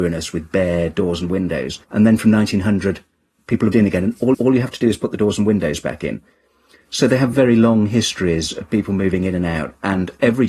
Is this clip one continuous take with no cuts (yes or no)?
no